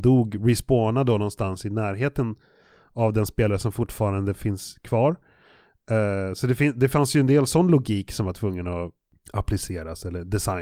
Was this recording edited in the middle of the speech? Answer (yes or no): no